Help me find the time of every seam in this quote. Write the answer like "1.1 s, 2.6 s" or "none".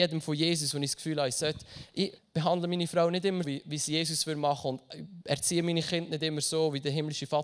2.2 s, 3.4 s